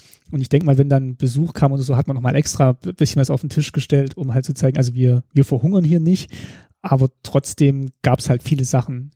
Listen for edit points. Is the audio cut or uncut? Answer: uncut